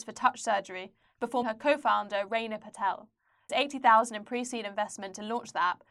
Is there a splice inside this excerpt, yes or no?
yes